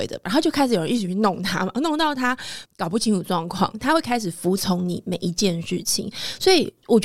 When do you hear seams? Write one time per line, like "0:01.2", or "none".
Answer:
0:02.6

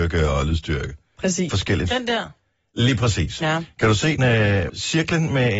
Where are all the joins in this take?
0:01.5
0:04.2
0:04.7

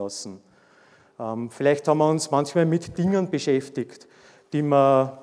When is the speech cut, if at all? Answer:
none

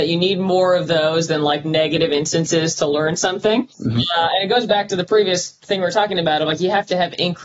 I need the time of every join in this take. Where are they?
0:03.7

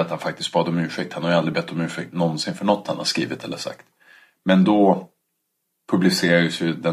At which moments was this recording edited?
none

